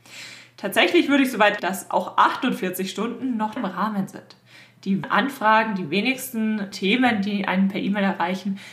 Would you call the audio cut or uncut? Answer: cut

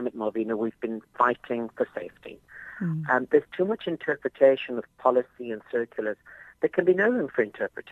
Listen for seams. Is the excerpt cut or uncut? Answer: uncut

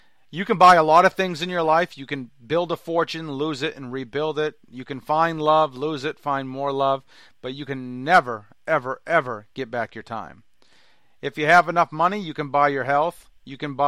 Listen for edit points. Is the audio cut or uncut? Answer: uncut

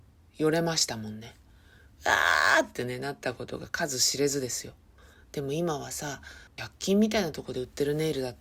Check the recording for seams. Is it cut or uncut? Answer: cut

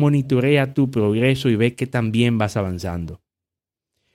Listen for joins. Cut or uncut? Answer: uncut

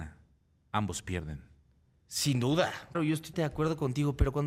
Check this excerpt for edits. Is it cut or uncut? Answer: cut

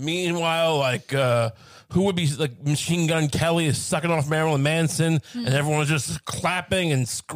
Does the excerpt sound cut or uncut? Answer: uncut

